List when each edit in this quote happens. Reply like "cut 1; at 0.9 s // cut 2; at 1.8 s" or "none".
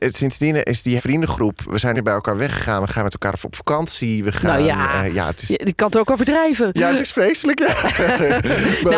cut 1; at 1.0 s // cut 2; at 1.9 s